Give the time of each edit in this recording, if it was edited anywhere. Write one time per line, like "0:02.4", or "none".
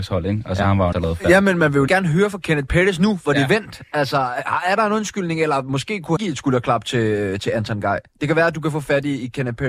0:00.9
0:01.9
0:06.2